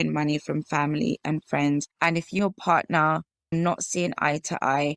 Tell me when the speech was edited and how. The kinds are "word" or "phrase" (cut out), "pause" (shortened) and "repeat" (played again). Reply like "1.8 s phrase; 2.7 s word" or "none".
1.9 s pause; 2.4 s word; 3.5 s word